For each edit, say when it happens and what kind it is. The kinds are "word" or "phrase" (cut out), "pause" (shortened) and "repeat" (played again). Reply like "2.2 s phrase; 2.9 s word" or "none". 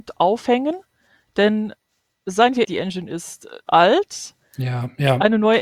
2.6 s word; 3.7 s word